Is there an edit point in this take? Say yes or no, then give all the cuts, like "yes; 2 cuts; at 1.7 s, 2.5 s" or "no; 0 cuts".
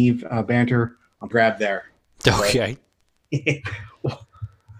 yes; 1 cut; at 1.3 s